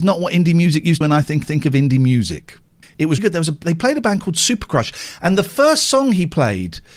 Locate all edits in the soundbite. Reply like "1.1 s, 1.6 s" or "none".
1.0 s, 1.4 s, 2.8 s, 3.2 s